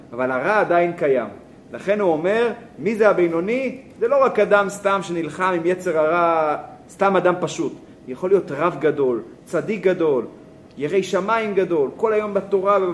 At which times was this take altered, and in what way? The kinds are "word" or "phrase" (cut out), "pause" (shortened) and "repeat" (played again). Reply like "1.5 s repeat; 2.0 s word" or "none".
none